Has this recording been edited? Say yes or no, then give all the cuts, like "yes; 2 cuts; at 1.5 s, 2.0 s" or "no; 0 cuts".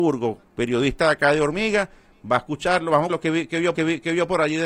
yes; 2 cuts; at 3.1 s, 3.7 s